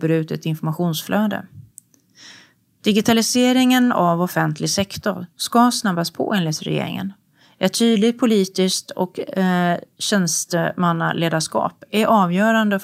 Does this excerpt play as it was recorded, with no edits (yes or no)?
yes